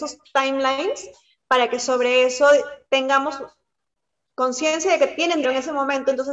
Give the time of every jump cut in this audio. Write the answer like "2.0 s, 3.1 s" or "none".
5.4 s